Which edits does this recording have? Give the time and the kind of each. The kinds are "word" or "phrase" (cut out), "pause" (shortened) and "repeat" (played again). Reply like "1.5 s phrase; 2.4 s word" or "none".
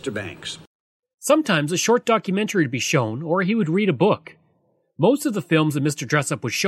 none